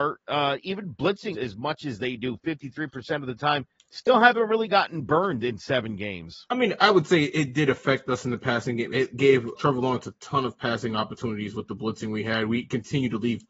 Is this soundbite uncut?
no; 3 cuts; at 1.3 s, 3.8 s, 9.5 s

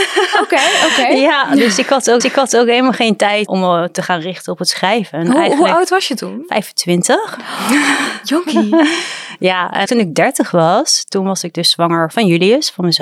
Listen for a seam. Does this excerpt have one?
yes; 4 cuts; at 2.2 s, 3.5 s, 9.9 s, 12.1 s

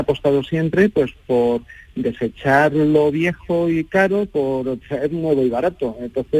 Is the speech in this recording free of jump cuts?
yes; 0 cuts

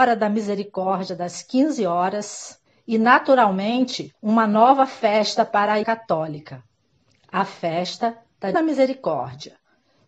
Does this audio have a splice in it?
yes; 4 cuts; at 2.7 s, 4.2 s, 5.8 s, 8.5 s

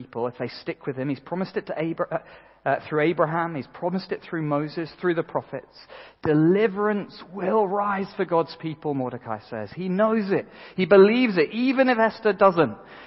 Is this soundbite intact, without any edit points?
yes; 0 cuts

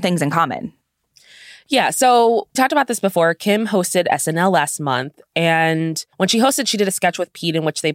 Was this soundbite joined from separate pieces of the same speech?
yes; 2 cuts; at 2.6 s, 6.1 s

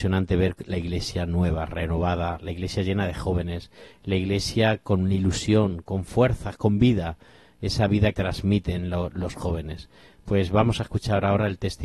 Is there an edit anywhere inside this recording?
yes; 2 cuts; at 5.9 s, 8.1 s

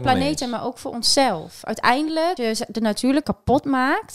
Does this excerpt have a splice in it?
yes; 2 cuts; at 2.4 s, 3.2 s

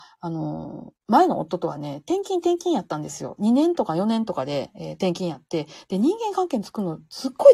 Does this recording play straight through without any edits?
yes; 0 cuts

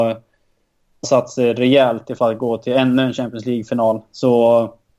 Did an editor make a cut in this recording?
yes; 2 cuts; at 1.0 s, 2.2 s

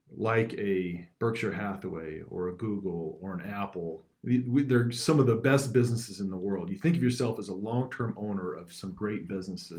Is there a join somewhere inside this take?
yes; 2 cuts; at 1.1 s, 4.1 s

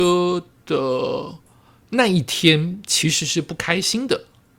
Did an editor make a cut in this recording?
no; 0 cuts

